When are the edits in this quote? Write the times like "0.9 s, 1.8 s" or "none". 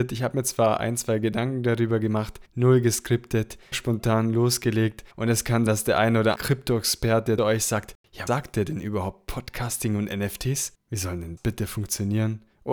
2.5 s, 3.7 s, 5.1 s, 5.7 s, 6.3 s, 7.4 s, 8.3 s, 10.8 s, 11.4 s